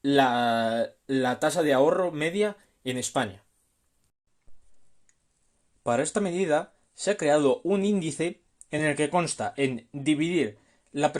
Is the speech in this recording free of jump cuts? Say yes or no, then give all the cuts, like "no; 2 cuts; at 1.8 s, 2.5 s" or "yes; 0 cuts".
yes; 0 cuts